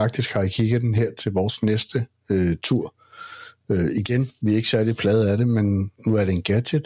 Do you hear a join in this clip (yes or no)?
yes